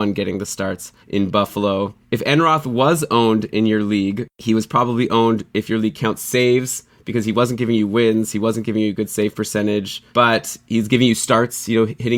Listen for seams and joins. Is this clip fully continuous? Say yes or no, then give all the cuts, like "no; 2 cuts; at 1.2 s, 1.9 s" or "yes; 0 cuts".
no; 3 cuts; at 1.0 s, 2.0 s, 10.1 s